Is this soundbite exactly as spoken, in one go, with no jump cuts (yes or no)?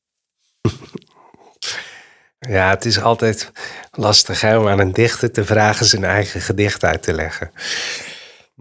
no